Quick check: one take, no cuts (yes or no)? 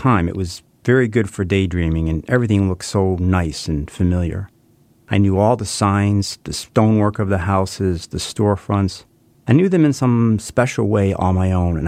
yes